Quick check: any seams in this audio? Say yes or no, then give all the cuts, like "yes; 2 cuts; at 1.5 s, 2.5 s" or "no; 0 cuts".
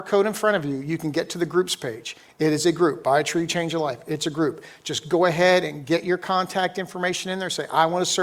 no; 0 cuts